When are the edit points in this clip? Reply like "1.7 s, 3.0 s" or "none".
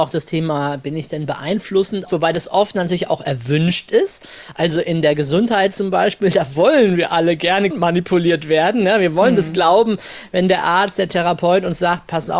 2.1 s, 7.7 s